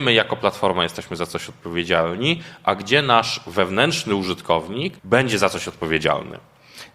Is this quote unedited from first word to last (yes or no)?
no